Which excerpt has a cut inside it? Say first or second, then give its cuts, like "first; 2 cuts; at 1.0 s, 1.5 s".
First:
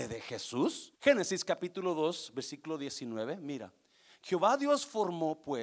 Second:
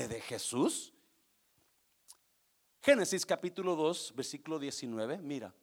first; 1 cut; at 1.0 s